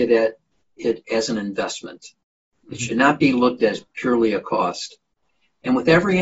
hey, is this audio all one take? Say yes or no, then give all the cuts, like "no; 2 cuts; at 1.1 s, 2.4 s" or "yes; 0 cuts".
yes; 0 cuts